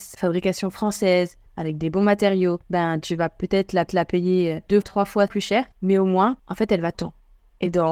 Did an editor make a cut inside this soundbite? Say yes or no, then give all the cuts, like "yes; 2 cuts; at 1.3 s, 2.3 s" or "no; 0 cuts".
yes; 8 cuts; at 1.5 s, 2.6 s, 3.9 s, 4.8 s, 5.3 s, 5.7 s, 6.4 s, 6.9 s